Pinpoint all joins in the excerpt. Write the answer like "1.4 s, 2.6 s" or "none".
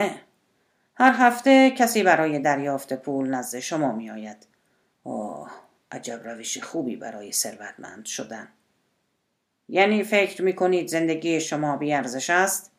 none